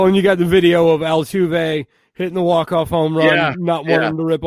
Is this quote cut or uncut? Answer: uncut